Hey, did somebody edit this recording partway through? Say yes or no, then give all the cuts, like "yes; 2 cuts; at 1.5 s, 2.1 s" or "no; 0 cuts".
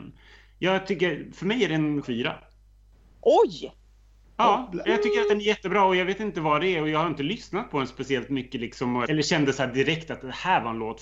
yes; 2 cuts; at 2.0 s, 9.0 s